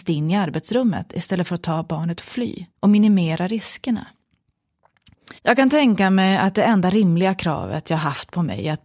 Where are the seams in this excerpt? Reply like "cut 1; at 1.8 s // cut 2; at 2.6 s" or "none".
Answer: cut 1; at 2.8 s // cut 2; at 5.4 s